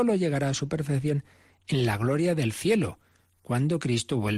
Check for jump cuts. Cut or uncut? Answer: uncut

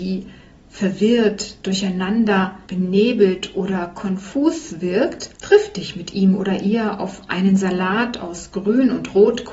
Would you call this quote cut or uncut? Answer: cut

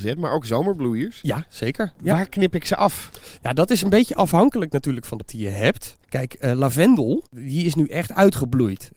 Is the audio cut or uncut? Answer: cut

